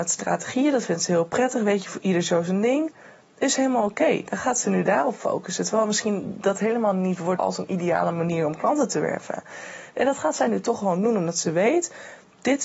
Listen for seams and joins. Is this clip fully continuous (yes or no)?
no